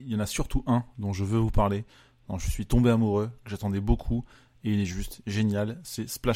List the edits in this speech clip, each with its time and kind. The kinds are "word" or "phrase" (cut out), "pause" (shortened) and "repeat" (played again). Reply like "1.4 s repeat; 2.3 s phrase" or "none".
none